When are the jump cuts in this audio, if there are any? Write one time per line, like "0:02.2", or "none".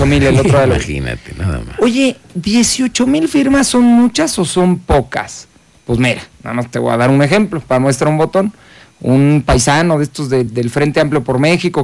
none